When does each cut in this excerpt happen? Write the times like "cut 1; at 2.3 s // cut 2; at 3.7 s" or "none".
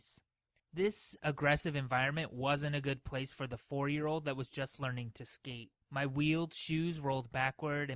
cut 1; at 5.8 s